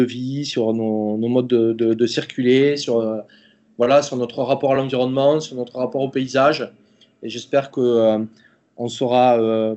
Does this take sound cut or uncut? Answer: uncut